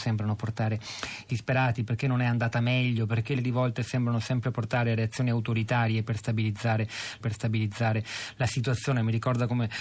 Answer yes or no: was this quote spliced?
yes